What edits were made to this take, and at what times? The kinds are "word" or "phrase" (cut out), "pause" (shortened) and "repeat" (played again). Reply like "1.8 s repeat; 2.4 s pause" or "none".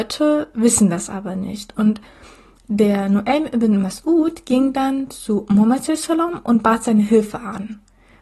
none